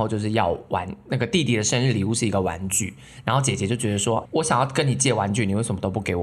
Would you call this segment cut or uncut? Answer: cut